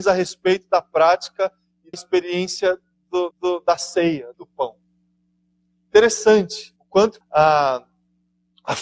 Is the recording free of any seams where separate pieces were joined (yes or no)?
no